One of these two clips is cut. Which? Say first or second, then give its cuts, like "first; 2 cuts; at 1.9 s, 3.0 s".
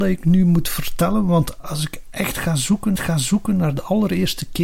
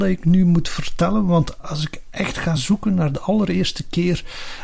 first; 1 cut; at 3.0 s